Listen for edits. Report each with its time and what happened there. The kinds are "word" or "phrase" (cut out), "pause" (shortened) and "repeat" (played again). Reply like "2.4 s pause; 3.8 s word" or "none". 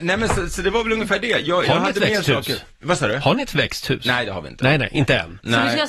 none